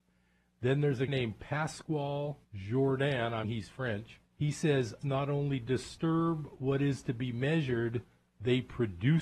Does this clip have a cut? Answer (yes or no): yes